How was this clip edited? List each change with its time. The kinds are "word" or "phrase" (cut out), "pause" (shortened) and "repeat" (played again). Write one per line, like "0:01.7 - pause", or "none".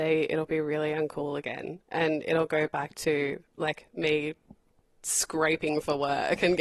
none